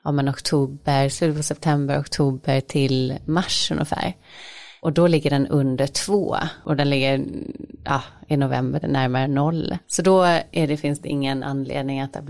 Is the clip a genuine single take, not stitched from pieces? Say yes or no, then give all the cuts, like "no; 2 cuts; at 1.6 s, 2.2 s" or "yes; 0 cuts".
no; 2 cuts; at 8.8 s, 9.8 s